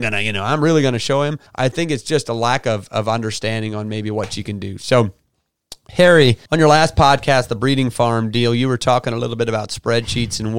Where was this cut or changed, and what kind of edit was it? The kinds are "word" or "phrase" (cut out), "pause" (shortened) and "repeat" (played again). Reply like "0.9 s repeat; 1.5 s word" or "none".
1.5 s pause; 6.5 s pause